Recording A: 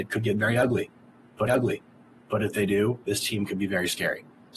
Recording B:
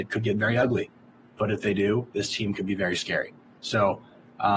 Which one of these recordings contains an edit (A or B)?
A